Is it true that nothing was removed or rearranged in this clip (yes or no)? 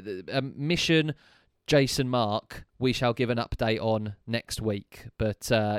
yes